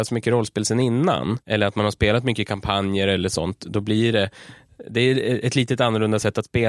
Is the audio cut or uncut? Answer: cut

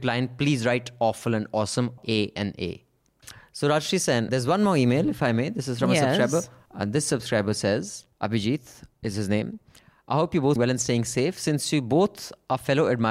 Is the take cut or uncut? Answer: cut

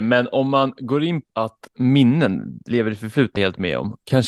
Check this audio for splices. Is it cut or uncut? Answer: cut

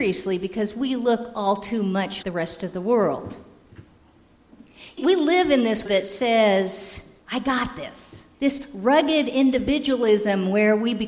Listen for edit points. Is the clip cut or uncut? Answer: cut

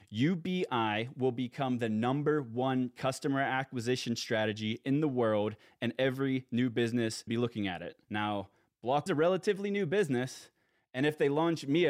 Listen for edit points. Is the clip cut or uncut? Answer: cut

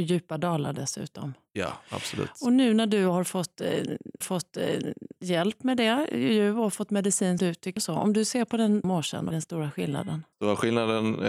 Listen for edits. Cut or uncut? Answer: cut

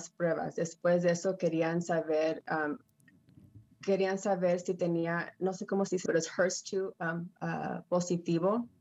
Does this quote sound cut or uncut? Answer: cut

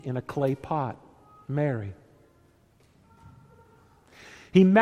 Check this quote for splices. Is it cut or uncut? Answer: uncut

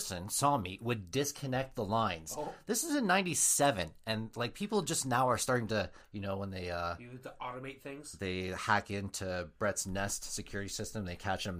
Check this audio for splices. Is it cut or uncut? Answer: cut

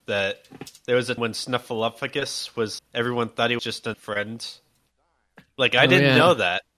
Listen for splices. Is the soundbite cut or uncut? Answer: cut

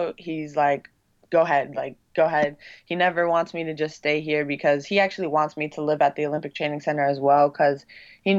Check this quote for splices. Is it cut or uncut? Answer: uncut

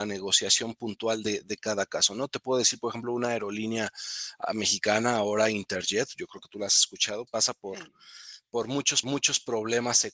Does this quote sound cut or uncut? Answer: cut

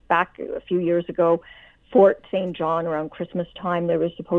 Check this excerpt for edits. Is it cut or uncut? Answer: uncut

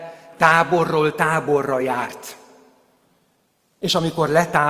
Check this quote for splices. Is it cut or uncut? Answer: uncut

